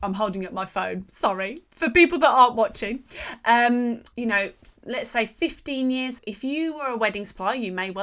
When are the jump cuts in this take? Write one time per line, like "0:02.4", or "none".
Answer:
0:04.1
0:04.8
0:06.2